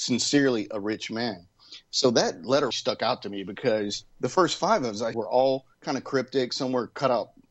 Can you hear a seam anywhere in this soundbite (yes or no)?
yes